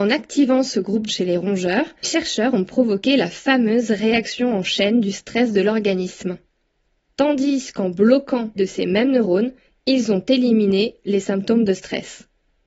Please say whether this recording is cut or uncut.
cut